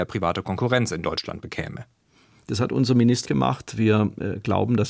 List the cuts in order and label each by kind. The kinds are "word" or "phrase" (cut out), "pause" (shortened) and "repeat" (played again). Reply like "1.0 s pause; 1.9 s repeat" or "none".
3.2 s phrase